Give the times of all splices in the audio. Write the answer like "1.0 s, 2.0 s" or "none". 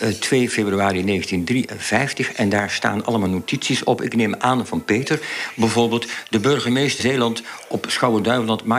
7.0 s